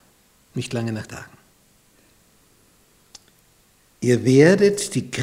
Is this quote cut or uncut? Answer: cut